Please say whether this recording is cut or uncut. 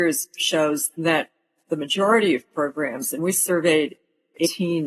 uncut